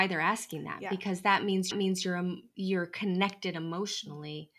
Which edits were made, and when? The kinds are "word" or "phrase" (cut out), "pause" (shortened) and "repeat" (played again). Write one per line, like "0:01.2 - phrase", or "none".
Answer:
0:01.7 - repeat
0:02.5 - pause